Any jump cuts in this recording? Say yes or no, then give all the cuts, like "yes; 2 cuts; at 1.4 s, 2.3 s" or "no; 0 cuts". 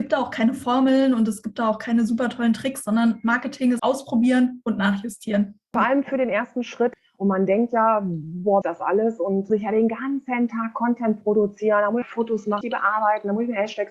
yes; 5 cuts; at 3.8 s, 8.6 s, 9.5 s, 12.0 s, 12.6 s